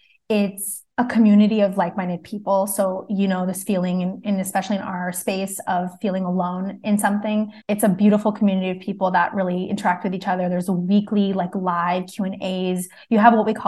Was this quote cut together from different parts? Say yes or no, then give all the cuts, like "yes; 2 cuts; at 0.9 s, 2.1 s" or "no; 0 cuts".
yes; 2 cuts; at 0.9 s, 7.6 s